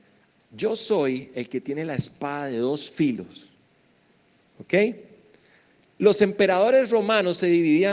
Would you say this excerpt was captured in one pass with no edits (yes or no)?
yes